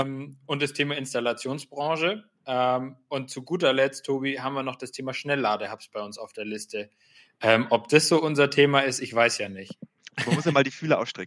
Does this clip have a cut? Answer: no; 0 cuts

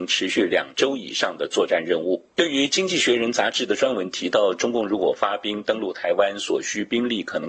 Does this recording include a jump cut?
yes; 1 cut; at 2.3 s

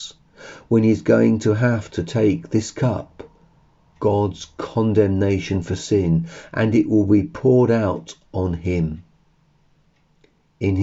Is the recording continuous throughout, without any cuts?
yes; 0 cuts

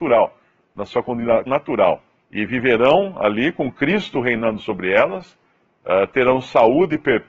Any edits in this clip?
yes; 2 cuts; at 1.5 s, 2.2 s

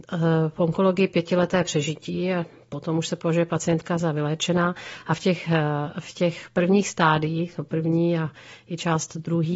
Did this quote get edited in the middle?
no; 0 cuts

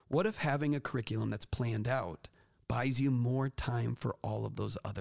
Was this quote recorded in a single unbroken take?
yes; 0 cuts

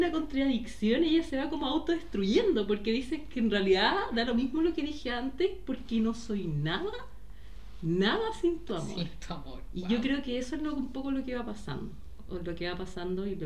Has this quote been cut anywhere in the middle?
no; 0 cuts

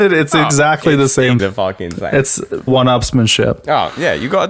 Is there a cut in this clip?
yes; 2 cuts; at 1.4 s, 2.7 s

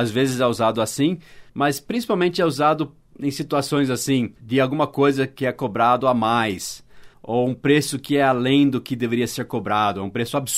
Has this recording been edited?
yes; 3 cuts; at 1.5 s, 4.4 s, 7.1 s

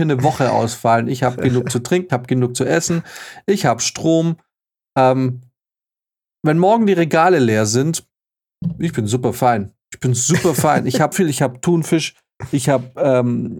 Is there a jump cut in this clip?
yes; 3 cuts; at 2.1 s, 9.8 s, 11.1 s

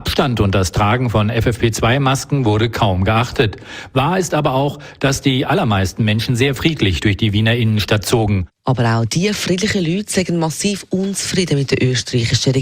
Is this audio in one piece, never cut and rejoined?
no; 1 cut; at 8.6 s

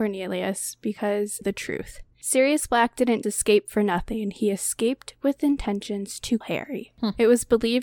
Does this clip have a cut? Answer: yes; 3 cuts; at 1.4 s, 3.2 s, 6.4 s

